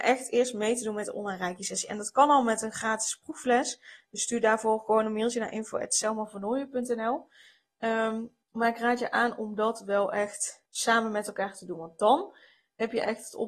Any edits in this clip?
yes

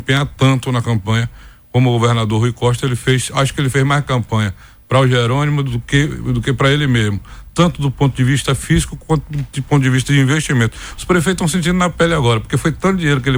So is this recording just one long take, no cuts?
yes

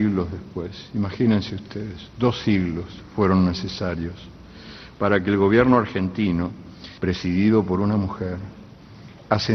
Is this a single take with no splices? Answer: no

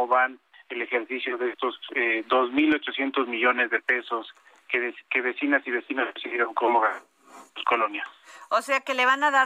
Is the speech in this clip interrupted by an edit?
no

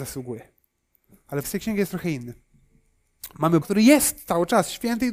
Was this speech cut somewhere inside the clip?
yes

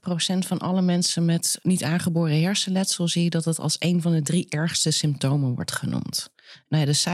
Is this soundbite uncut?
yes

